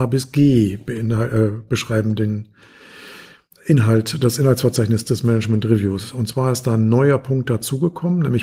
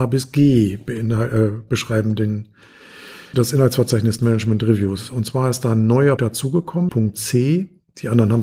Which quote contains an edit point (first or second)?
second